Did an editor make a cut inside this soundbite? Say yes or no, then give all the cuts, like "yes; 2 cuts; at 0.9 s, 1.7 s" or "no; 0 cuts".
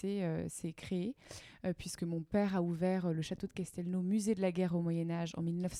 no; 0 cuts